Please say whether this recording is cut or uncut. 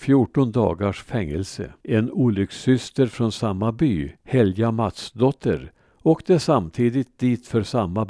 cut